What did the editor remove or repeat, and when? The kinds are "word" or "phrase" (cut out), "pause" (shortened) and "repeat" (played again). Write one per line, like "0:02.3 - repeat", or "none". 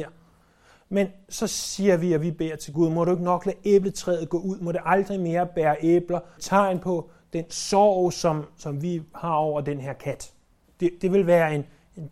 0:02.7 - word
0:06.4 - phrase
0:10.6 - pause